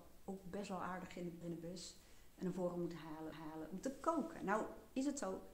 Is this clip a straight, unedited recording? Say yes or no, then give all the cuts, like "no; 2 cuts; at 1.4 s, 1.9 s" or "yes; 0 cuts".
no; 2 cuts; at 1.4 s, 3.3 s